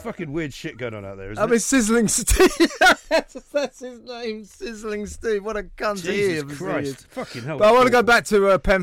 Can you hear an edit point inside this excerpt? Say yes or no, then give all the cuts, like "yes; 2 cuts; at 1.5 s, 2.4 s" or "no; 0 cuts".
no; 0 cuts